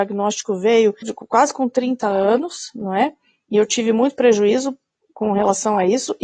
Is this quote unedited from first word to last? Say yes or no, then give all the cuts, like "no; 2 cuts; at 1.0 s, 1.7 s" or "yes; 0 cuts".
no; 1 cut; at 1.0 s